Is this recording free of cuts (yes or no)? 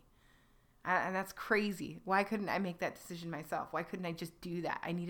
yes